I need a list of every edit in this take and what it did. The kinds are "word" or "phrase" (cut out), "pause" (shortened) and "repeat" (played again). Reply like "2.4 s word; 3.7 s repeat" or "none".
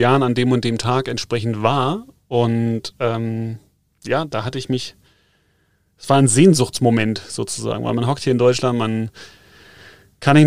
none